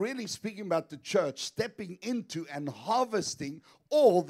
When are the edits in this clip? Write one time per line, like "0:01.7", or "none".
none